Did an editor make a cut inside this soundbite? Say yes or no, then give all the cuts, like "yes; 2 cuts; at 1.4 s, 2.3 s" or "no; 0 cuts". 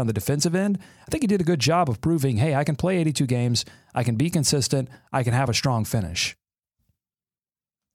no; 0 cuts